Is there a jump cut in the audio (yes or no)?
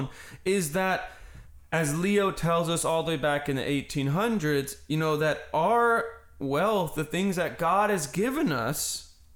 no